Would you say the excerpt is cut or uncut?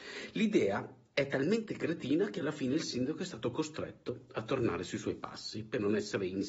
uncut